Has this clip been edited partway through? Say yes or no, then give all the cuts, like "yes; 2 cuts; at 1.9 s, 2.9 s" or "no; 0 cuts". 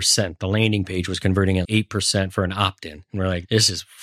yes; 1 cut; at 1.6 s